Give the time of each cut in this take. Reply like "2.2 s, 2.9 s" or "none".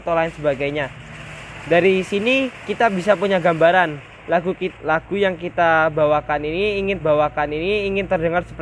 4.8 s, 7.0 s